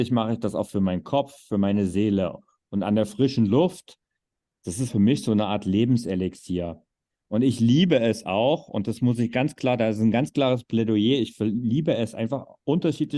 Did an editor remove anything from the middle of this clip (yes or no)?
yes